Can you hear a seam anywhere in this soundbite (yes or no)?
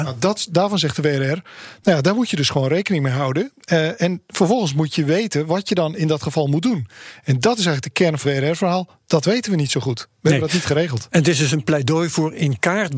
yes